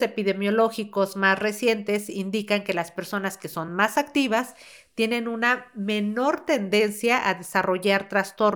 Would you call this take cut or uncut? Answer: uncut